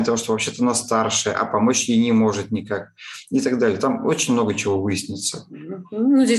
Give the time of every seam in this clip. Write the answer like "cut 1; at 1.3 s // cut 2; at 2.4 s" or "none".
none